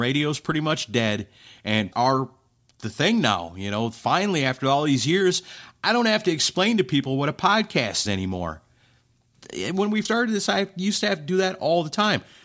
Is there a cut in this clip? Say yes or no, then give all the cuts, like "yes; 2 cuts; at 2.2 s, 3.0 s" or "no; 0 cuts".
yes; 3 cuts; at 1.9 s, 8.0 s, 10.0 s